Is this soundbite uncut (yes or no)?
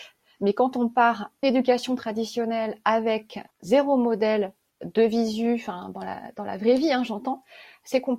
no